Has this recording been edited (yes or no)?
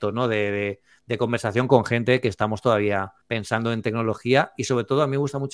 yes